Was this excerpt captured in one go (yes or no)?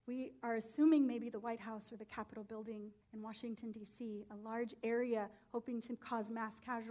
no